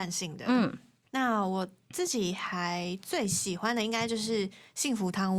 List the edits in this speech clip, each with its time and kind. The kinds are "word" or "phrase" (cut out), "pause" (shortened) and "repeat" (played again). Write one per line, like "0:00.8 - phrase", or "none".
none